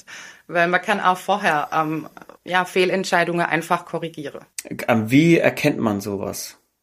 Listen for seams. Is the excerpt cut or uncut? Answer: cut